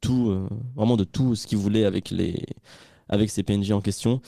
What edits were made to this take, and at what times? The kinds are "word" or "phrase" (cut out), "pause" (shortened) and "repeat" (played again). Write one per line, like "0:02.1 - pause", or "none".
none